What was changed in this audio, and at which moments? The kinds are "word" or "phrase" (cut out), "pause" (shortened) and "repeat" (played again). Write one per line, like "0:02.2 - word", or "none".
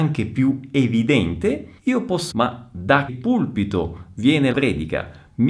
0:01.8 - pause
0:02.3 - word
0:03.1 - word
0:04.5 - word